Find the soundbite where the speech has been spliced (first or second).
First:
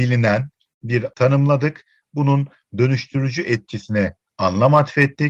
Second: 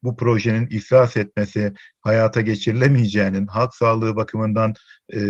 first